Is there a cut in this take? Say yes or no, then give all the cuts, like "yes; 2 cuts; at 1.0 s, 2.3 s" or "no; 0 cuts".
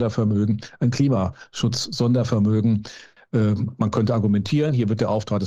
no; 0 cuts